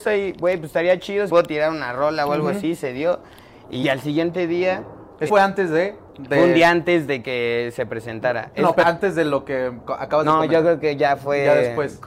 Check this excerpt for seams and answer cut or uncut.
cut